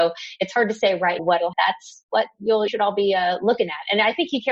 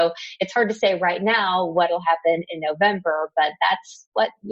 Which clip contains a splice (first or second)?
first